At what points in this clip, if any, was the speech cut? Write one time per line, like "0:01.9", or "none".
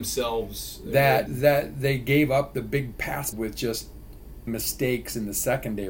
0:01.3
0:03.3
0:04.5